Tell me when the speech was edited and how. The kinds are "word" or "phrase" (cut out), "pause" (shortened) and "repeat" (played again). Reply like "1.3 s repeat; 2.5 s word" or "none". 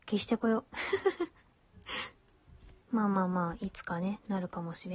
2.8 s pause

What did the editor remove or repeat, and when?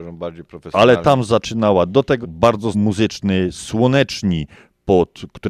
2.2 s word; 2.7 s phrase

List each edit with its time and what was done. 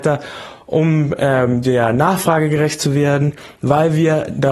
none

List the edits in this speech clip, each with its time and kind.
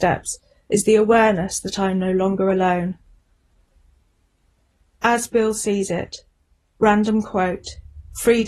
none

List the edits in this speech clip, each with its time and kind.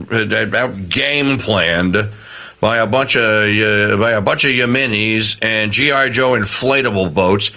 none

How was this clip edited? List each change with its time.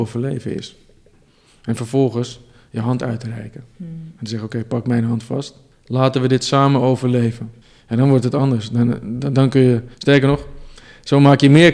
5.7 s pause; 7.6 s pause; 9.9 s pause

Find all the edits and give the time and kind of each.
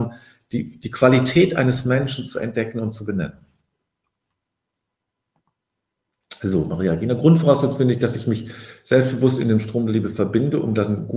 none

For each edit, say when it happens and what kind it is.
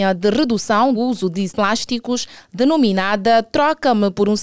0.9 s word; 1.5 s word

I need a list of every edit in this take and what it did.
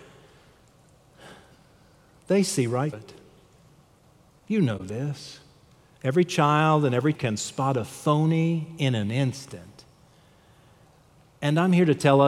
2.9 s word; 7.1 s word

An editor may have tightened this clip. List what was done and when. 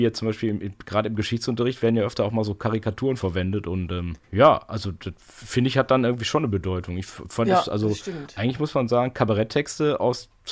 4.2 s pause

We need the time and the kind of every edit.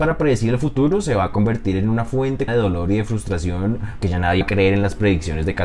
2.5 s word; 4.0 s word; 4.4 s word

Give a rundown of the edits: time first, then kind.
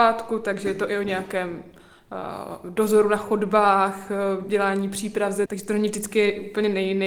5.5 s phrase

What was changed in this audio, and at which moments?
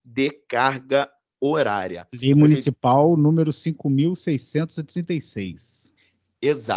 none

